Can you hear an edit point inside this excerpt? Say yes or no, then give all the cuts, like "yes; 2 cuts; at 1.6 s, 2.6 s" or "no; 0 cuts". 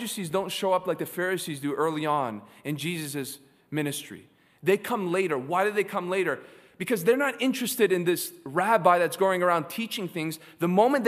no; 0 cuts